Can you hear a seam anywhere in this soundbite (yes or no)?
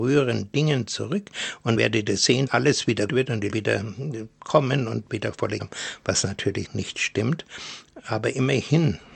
yes